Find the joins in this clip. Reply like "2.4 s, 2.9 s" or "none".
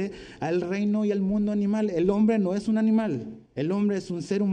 3.5 s